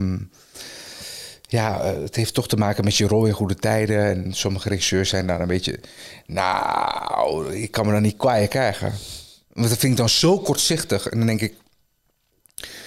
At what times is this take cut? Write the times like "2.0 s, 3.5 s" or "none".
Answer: none